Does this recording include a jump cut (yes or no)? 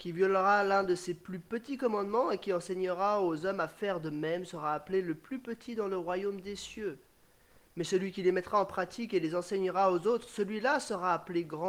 no